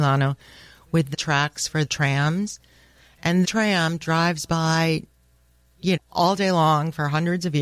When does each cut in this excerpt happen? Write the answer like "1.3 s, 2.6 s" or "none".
1.1 s, 1.9 s, 3.4 s, 6.0 s